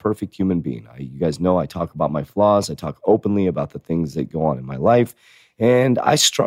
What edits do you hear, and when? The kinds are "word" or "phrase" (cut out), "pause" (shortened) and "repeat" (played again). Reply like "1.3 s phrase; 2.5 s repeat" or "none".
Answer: none